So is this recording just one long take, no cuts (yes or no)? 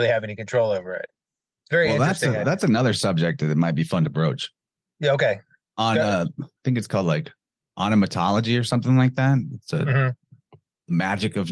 yes